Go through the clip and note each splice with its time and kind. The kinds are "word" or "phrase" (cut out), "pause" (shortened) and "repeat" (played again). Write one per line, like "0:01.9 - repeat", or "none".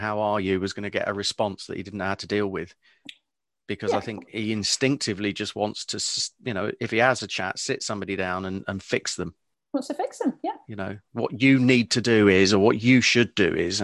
none